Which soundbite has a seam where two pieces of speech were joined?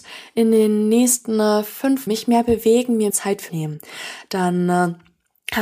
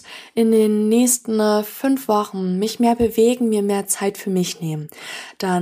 first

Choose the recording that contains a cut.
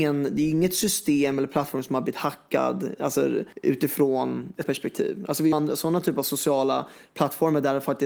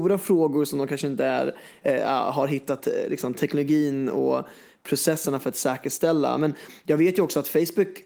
first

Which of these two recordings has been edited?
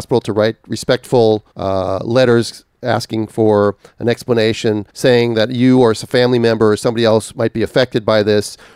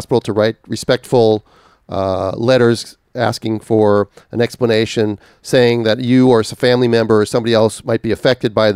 first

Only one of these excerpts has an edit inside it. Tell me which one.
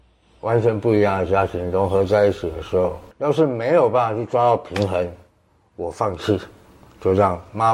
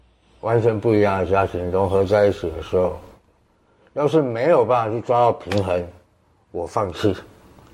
first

